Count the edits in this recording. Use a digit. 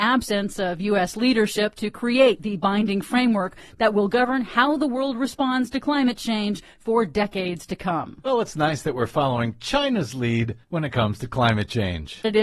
1